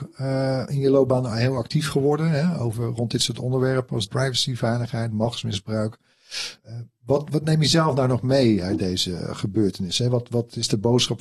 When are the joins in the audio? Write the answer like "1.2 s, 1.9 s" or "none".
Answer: 4.1 s, 6.6 s